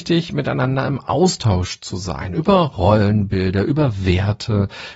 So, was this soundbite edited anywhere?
no; 0 cuts

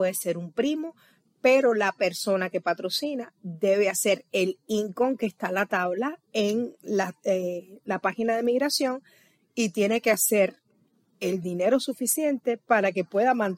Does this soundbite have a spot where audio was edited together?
no; 0 cuts

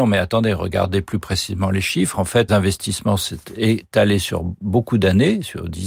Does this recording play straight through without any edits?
no; 1 cut; at 2.5 s

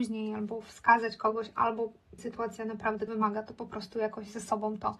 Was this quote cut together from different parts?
yes; 2 cuts; at 2.2 s, 3.1 s

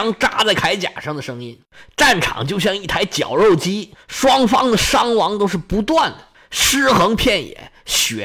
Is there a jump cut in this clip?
no; 0 cuts

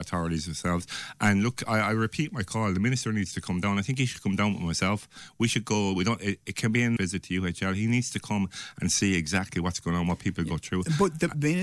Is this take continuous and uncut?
no; 1 cut; at 7.0 s

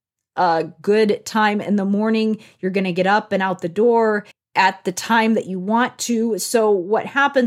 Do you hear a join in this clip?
yes; 1 cut; at 4.3 s

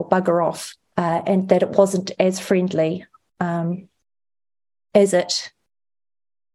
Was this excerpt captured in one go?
no; 1 cut; at 0.9 s

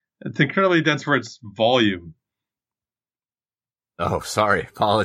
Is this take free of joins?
yes; 0 cuts

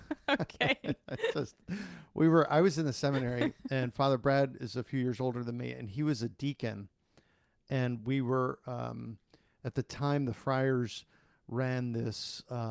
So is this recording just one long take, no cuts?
yes; 0 cuts

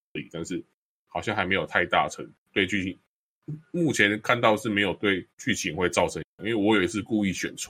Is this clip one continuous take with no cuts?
no; 3 cuts; at 2.4 s, 5.3 s, 6.3 s

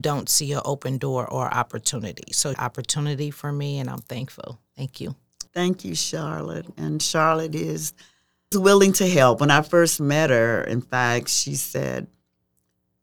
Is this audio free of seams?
no; 4 cuts; at 2.5 s, 4.7 s, 5.5 s, 8.5 s

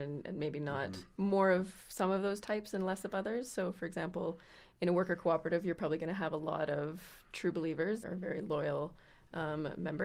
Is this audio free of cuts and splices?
no; 1 cut; at 8.0 s

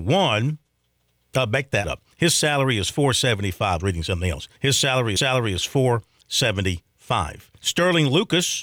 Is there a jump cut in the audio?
yes; 5 cuts; at 1.8 s, 3.8 s, 4.6 s, 5.2 s, 7.6 s

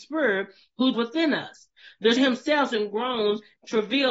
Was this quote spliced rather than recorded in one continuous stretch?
yes; 3 cuts; at 0.9 s, 2.2 s, 2.7 s

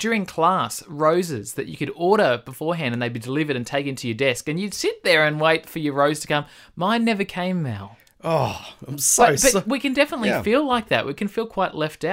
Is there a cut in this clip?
no; 0 cuts

